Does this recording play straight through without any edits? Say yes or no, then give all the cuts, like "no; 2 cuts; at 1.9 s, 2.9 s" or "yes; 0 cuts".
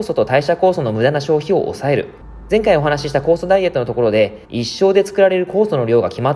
no; 1 cut; at 4.4 s